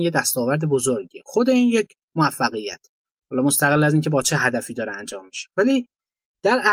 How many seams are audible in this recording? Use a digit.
0